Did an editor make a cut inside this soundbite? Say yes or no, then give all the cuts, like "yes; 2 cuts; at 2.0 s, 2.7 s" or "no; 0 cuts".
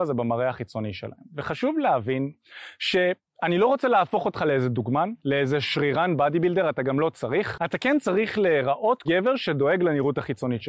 yes; 2 cuts; at 5.2 s, 9.0 s